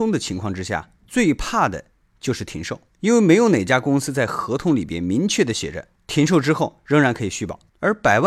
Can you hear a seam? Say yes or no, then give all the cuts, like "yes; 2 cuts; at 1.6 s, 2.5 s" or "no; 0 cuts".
no; 0 cuts